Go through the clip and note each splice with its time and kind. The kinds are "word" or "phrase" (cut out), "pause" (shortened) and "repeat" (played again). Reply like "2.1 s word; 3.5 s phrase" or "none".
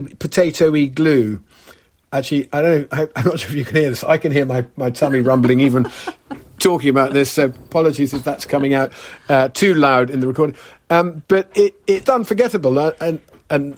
12.0 s phrase